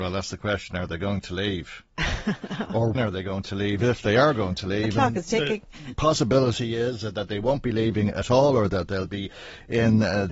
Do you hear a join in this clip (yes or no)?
yes